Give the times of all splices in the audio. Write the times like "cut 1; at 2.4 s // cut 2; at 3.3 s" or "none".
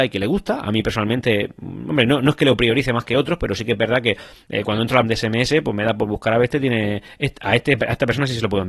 cut 1; at 5.0 s